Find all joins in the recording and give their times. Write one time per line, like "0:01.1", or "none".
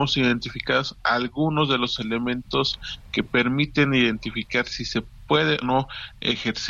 0:05.6